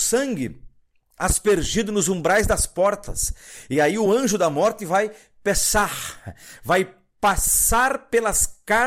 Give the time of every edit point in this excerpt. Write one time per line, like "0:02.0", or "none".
none